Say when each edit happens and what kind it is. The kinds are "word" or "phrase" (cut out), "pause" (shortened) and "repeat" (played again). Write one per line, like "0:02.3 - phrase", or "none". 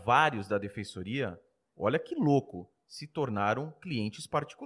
none